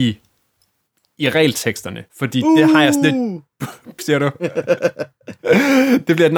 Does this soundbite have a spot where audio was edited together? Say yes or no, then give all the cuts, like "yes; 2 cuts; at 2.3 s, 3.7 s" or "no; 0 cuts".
yes; 3 cuts; at 2.1 s, 3.5 s, 4.0 s